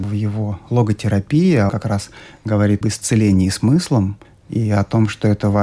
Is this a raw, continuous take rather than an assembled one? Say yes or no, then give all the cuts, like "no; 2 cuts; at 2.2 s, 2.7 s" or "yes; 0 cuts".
no; 3 cuts; at 1.7 s, 2.8 s, 4.2 s